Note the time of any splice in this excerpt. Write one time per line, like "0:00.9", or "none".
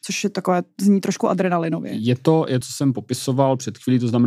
0:02.6

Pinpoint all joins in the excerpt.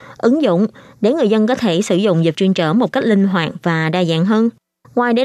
0:02.3

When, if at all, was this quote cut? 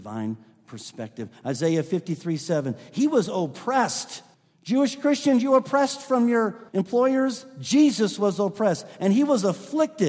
0:04.3
0:06.7

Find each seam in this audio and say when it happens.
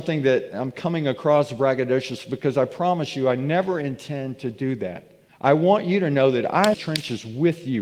0:05.3
0:06.7

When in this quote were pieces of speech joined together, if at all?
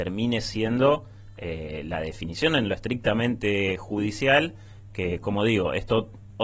none

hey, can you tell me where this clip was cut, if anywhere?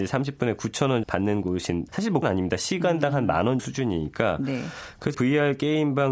0:01.0
0:01.9
0:02.2
0:03.6
0:05.1

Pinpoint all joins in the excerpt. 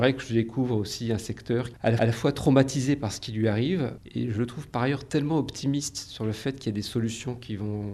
0:02.0

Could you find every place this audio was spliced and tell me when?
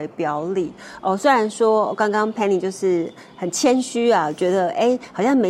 none

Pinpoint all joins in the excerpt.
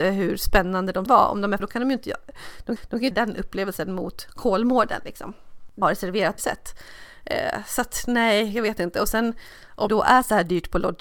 0:01.1
0:01.6
0:02.8
0:03.1
0:05.8
0:06.4
0:09.9

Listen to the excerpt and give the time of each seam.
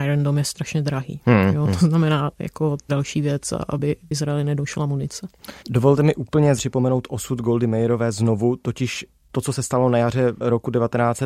0:02.9
0:05.6
0:06.6

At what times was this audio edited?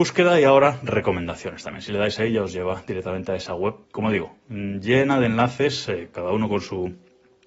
0:03.8

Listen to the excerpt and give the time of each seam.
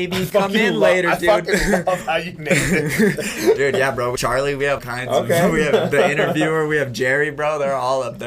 0:04.1
0:04.8

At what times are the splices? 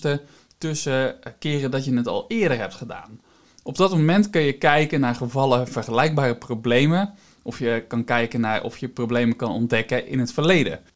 none

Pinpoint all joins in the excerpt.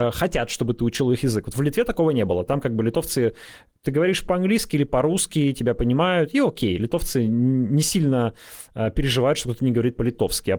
none

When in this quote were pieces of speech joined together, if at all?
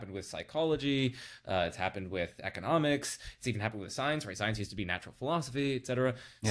none

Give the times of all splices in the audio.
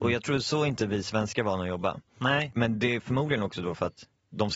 none

